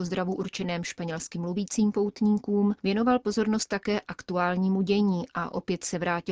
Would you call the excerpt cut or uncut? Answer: uncut